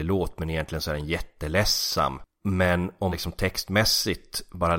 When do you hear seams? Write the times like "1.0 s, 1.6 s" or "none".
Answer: 3.1 s